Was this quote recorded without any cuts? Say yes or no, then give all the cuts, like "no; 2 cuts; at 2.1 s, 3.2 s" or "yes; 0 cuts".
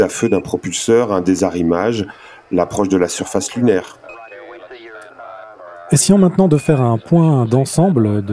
yes; 0 cuts